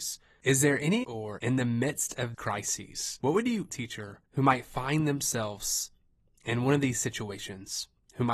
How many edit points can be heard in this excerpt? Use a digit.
5